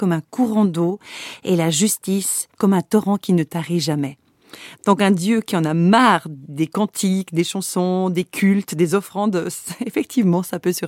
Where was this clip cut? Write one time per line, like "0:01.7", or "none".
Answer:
0:02.5